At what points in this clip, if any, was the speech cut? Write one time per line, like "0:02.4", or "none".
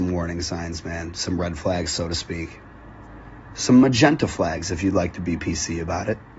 none